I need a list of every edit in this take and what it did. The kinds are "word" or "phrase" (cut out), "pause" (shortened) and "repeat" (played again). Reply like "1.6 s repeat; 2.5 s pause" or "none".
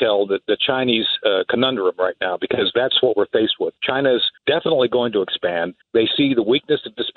4.4 s pause; 5.8 s pause